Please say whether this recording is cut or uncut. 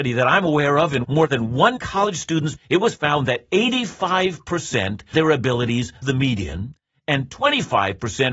cut